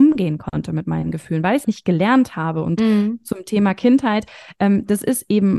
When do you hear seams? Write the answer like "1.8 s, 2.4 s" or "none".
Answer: 1.6 s